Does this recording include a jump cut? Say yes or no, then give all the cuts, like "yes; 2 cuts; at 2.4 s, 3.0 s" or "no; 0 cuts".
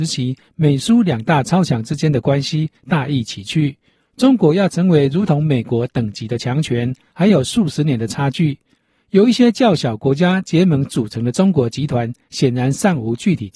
no; 0 cuts